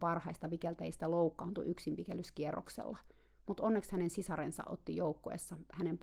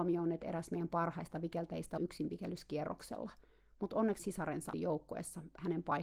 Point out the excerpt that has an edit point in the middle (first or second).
second